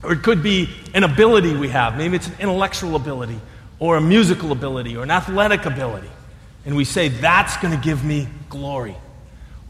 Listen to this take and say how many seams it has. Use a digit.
0